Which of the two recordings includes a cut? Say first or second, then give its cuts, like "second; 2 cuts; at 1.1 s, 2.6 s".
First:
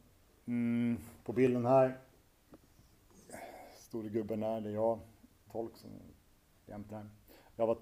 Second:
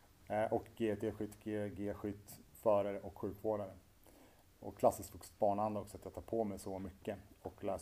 first; 2 cuts; at 5.5 s, 6.9 s